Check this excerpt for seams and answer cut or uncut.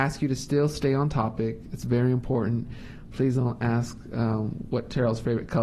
uncut